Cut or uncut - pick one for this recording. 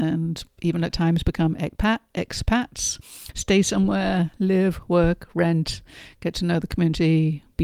uncut